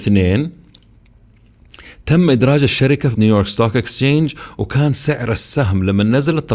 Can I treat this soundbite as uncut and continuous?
no; 1 cut; at 3.1 s

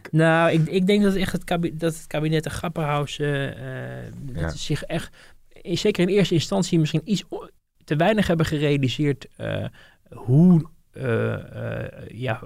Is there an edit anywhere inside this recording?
no; 0 cuts

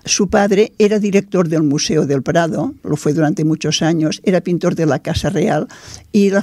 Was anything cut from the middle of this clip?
yes; 1 cut; at 2.8 s

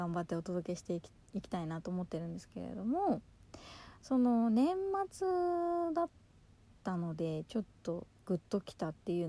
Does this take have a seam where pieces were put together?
no; 0 cuts

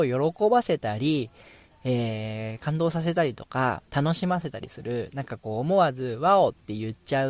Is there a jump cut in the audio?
yes; 1 cut; at 3.9 s

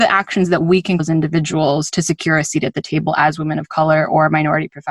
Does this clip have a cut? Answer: yes; 1 cut; at 1.0 s

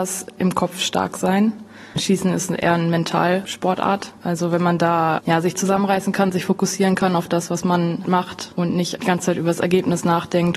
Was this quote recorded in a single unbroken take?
no; 2 cuts; at 4.2 s, 8.1 s

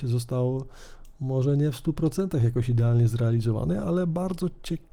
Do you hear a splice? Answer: no; 0 cuts

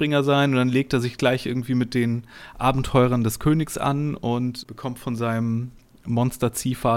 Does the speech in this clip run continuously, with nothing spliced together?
yes; 0 cuts

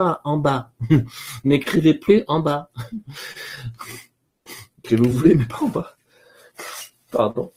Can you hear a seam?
no; 0 cuts

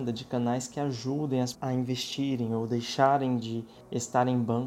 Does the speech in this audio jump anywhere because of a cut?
yes; 1 cut; at 1.5 s

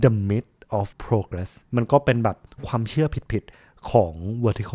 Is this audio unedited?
no; 3 cuts; at 0.9 s, 1.6 s, 3.5 s

